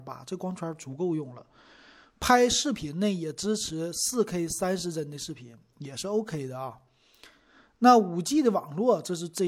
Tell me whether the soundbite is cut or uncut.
uncut